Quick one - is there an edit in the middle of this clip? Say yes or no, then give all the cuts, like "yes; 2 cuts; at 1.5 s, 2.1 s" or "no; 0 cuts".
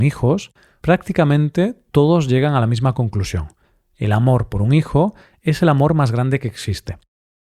no; 0 cuts